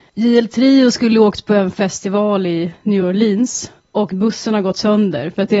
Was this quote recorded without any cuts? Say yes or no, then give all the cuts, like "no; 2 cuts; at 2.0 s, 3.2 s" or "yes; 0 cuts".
yes; 0 cuts